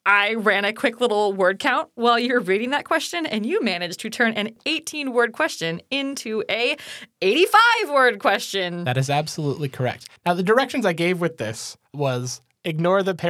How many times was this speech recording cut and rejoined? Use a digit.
2